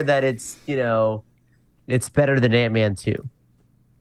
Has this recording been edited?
no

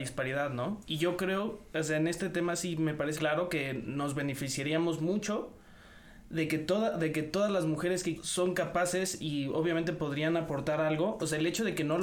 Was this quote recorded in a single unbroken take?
no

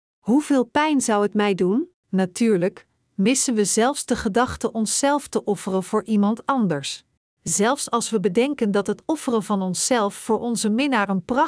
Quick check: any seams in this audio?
yes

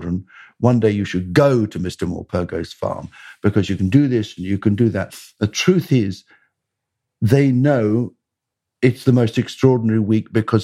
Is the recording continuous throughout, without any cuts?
yes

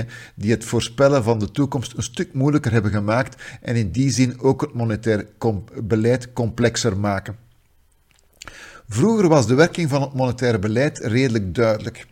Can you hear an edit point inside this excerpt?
no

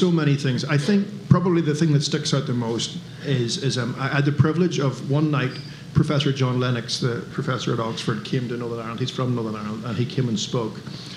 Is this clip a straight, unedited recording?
no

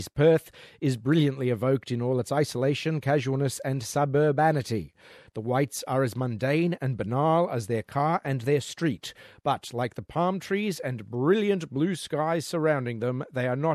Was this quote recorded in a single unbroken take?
yes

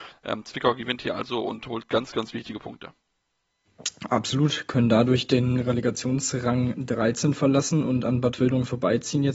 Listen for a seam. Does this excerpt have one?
no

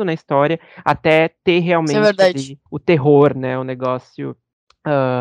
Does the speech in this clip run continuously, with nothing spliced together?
no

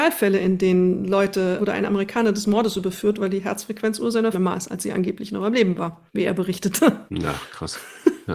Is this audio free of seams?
no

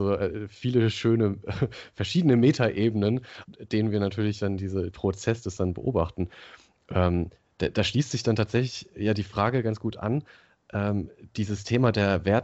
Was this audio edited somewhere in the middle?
yes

